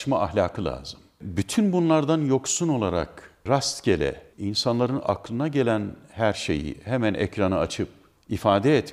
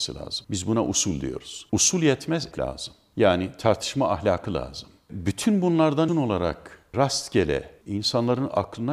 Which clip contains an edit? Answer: second; 2 cuts; at 2.5 s, 6.1 s

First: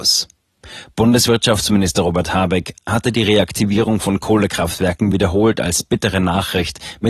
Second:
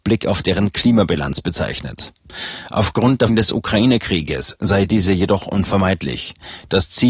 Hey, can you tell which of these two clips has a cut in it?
second; 1 cut; at 3.3 s

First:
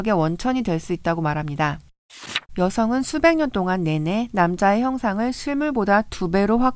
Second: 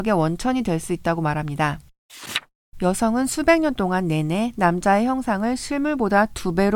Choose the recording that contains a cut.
first; 1 cut; at 2.5 s

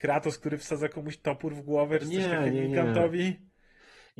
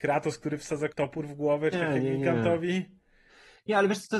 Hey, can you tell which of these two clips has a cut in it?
second; 2 cuts; at 0.9 s, 1.7 s

